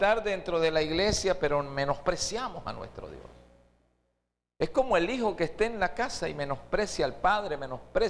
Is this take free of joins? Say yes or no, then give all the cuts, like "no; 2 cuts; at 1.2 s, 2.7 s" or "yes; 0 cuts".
yes; 0 cuts